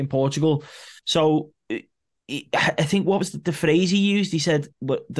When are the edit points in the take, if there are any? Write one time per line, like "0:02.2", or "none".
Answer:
0:01.0